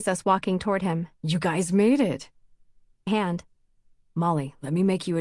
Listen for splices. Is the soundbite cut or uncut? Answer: cut